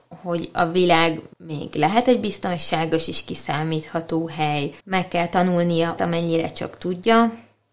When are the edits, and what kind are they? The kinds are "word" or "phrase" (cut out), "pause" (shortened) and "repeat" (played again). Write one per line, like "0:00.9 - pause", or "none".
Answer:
0:01.3 - pause
0:04.8 - pause
0:06.0 - phrase